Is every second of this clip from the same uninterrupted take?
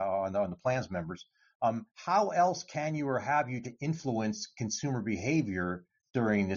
no; 2 cuts; at 1.9 s, 3.6 s

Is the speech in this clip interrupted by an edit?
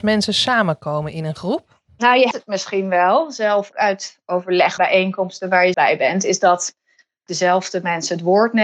yes; 5 cuts; at 2.3 s, 3.7 s, 4.8 s, 5.7 s, 7.3 s

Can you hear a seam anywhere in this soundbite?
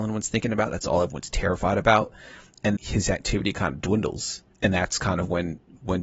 yes; 2 cuts; at 2.8 s, 4.5 s

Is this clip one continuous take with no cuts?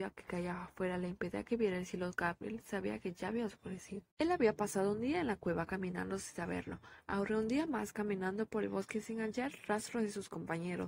no; 1 cut; at 4.1 s

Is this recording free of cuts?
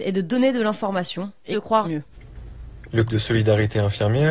no; 3 cuts; at 1.5 s, 1.8 s, 3.1 s

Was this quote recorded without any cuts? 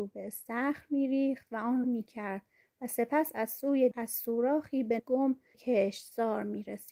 no; 4 cuts; at 1.8 s, 3.9 s, 5.0 s, 5.5 s

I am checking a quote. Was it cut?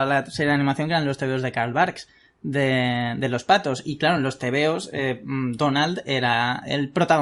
no; 0 cuts

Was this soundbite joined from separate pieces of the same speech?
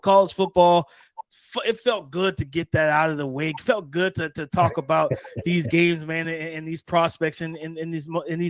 no; 0 cuts

